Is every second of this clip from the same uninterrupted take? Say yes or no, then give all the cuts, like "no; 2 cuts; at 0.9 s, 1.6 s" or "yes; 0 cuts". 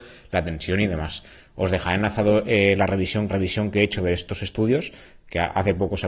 no; 1 cut; at 3.3 s